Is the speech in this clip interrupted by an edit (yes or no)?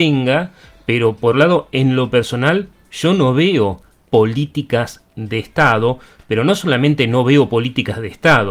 yes